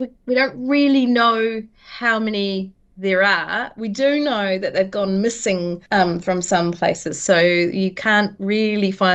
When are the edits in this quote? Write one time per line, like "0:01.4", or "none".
0:05.9